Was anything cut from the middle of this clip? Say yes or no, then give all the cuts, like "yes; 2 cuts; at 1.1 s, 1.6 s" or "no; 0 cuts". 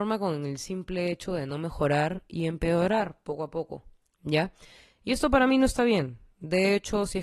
no; 0 cuts